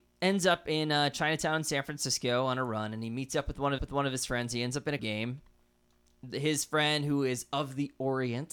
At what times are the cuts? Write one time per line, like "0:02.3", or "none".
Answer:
0:03.8
0:05.0